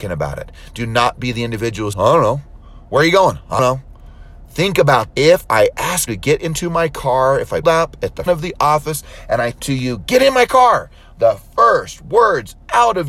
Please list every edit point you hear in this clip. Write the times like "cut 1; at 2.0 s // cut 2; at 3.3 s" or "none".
cut 1; at 1.9 s // cut 2; at 3.6 s // cut 3; at 5.1 s // cut 4; at 6.1 s // cut 5; at 7.6 s // cut 6; at 8.3 s // cut 7; at 9.5 s